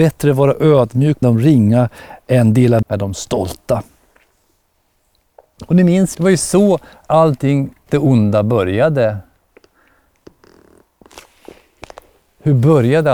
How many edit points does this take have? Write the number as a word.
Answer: four